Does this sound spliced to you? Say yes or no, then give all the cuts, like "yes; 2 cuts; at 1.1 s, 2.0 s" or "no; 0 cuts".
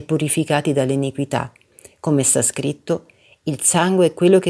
no; 0 cuts